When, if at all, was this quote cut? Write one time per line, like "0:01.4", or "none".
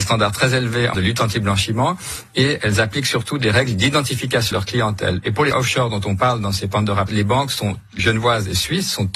0:00.9
0:04.5
0:05.5
0:07.1
0:08.0